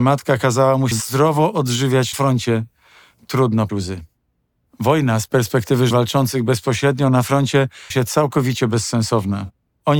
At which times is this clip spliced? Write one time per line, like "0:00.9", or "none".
0:00.9
0:02.1
0:03.7
0:05.9
0:07.9